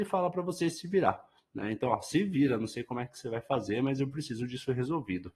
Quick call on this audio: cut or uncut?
uncut